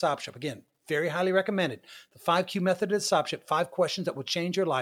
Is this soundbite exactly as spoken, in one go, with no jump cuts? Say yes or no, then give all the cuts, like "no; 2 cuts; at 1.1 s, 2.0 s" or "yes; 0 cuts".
yes; 0 cuts